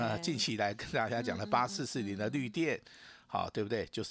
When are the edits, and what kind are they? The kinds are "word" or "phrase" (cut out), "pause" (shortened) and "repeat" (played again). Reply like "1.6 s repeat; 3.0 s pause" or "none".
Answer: none